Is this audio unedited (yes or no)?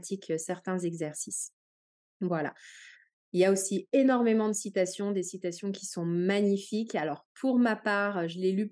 yes